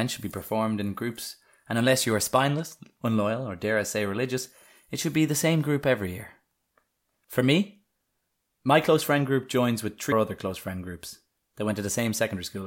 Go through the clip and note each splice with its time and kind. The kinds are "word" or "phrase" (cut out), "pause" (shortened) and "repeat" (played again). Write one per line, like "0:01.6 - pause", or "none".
0:10.1 - phrase